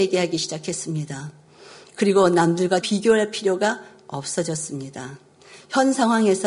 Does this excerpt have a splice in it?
yes; 1 cut; at 2.8 s

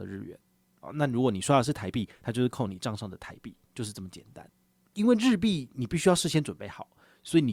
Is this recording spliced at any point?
no; 0 cuts

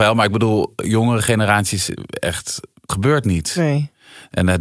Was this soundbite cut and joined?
yes; 1 cut; at 2.9 s

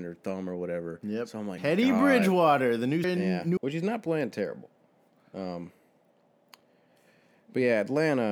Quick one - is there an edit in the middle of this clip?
yes; 3 cuts; at 1.6 s, 3.0 s, 3.6 s

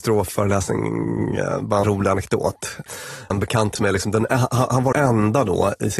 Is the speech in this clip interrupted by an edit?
yes; 4 cuts; at 1.8 s, 3.3 s, 3.8 s, 4.9 s

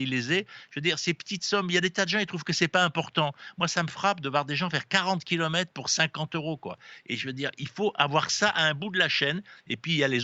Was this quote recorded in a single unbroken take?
yes; 0 cuts

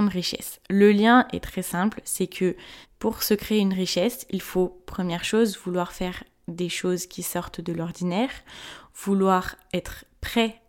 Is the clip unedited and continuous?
no; 1 cut; at 2.8 s

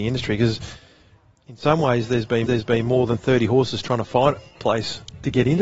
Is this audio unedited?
no; 2 cuts; at 2.5 s, 4.5 s

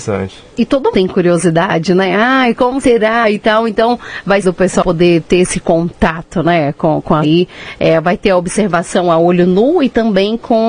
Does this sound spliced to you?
yes; 3 cuts; at 0.9 s, 4.4 s, 7.2 s

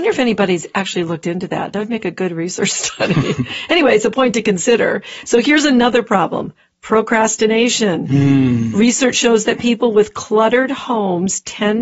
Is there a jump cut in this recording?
no; 0 cuts

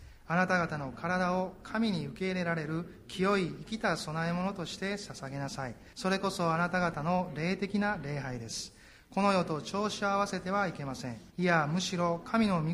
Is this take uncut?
no; 2 cuts; at 5.9 s, 11.3 s

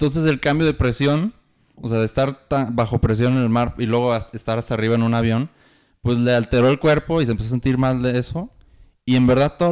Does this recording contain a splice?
no; 0 cuts

